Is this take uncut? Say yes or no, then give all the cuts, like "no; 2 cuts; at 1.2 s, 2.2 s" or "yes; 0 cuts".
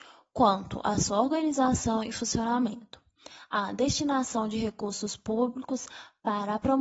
yes; 0 cuts